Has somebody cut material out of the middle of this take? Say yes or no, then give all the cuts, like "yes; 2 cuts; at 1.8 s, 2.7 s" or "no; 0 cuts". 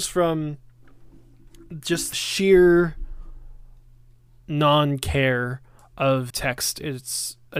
yes; 2 cuts; at 2.1 s, 6.3 s